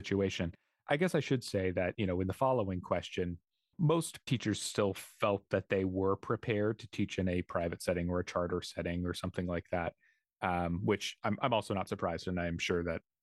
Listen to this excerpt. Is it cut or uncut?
uncut